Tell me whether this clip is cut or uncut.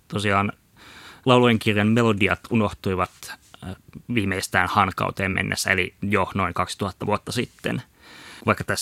uncut